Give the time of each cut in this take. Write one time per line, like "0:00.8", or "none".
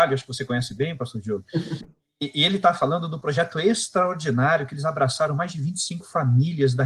none